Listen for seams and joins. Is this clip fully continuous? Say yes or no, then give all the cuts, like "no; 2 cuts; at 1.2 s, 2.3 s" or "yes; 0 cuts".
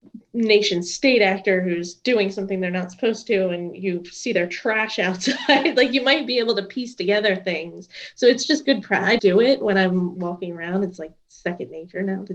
no; 2 cuts; at 9.2 s, 10.2 s